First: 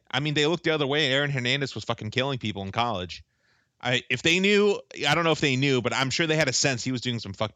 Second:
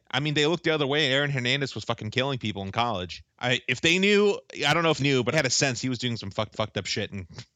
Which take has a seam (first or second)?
second